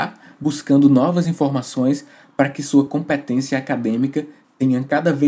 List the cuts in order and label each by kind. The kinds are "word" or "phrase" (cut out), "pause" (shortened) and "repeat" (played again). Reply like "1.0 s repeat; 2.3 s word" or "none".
none